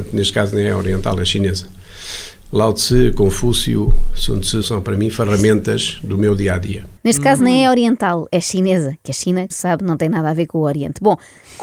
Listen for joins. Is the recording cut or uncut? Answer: cut